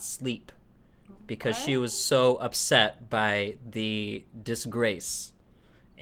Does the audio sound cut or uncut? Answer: uncut